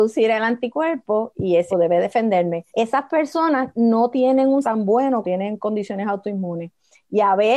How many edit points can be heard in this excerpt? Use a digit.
4